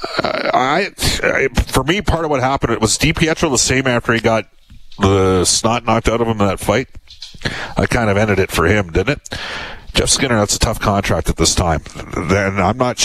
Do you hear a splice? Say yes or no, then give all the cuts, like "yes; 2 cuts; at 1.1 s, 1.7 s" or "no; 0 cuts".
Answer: no; 0 cuts